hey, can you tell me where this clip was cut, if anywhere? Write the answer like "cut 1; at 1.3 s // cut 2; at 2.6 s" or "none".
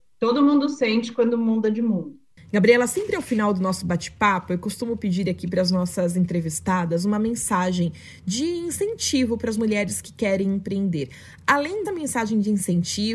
cut 1; at 11.8 s